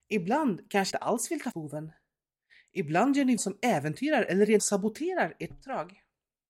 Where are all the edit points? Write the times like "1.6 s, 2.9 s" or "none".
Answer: 0.9 s, 1.5 s, 3.4 s, 4.6 s, 5.5 s